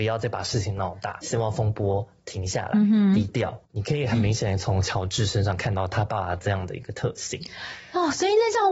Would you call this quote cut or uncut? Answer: cut